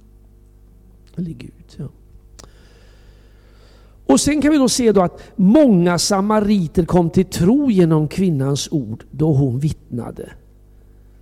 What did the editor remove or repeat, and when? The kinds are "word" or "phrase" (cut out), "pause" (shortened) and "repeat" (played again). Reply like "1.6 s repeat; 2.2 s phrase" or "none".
none